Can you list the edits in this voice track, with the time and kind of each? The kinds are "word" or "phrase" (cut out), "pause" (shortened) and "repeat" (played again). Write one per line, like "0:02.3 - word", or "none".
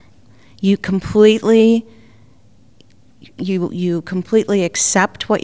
none

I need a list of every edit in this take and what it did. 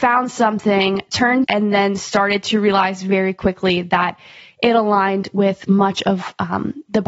0:01.4 - phrase

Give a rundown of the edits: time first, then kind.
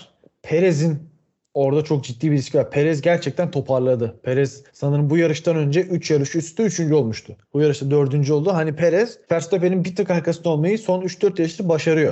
0:04.7 - pause
0:07.4 - pause
0:09.2 - pause

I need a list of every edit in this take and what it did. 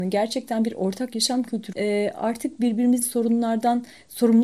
0:01.7 - word
0:03.0 - word

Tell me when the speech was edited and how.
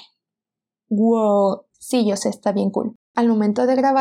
0:01.7 - pause
0:03.0 - pause

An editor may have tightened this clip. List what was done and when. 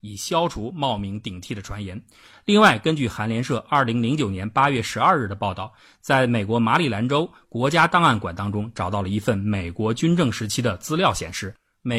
none

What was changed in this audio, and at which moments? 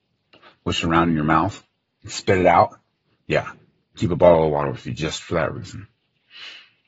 none

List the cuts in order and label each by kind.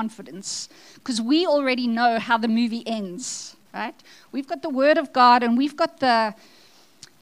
0:03.7 - pause

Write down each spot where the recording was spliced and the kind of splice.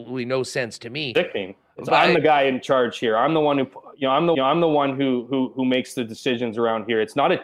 0:04.3 - repeat

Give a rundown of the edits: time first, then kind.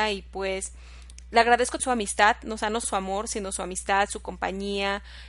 0:01.8 - word
0:02.8 - word

